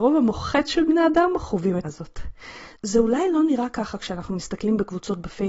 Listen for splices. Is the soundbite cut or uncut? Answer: cut